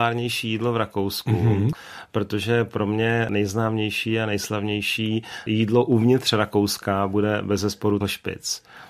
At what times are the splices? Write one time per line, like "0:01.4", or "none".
0:08.0